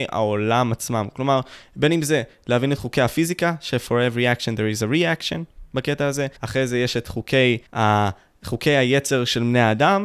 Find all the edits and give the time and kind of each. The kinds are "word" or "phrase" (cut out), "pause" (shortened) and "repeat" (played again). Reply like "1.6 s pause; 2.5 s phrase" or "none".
6.4 s pause; 7.7 s pause